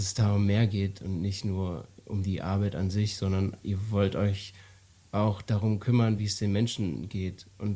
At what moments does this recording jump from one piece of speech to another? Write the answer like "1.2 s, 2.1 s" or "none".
none

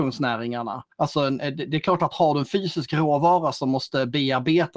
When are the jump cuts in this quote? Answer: 0.9 s

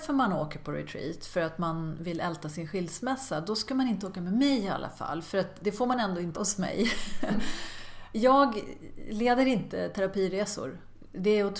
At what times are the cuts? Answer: 6.4 s

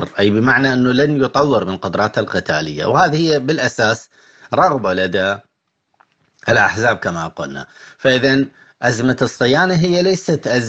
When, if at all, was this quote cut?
none

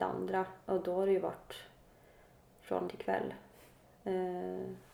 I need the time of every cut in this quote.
2.9 s

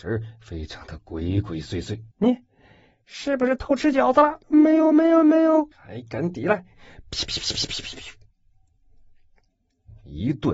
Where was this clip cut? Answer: 2.1 s, 4.4 s, 5.7 s

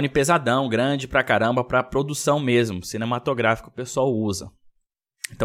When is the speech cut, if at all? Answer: none

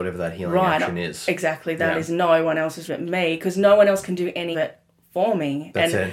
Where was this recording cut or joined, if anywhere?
2.9 s, 4.5 s

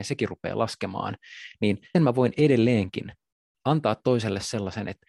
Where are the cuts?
1.9 s

